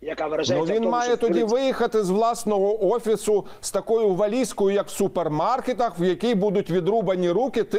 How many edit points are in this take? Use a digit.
0